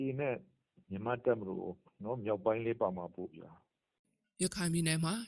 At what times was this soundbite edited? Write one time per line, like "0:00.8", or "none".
0:01.8